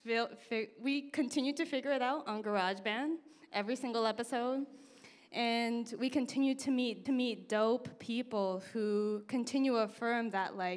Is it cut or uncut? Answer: cut